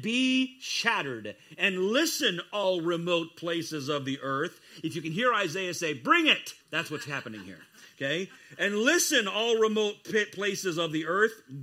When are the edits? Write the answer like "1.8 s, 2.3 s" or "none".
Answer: 6.6 s